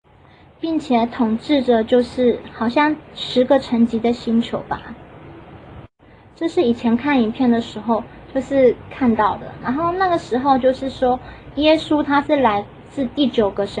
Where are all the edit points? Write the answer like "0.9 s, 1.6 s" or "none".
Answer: none